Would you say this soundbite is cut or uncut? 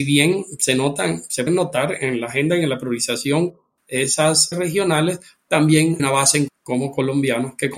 cut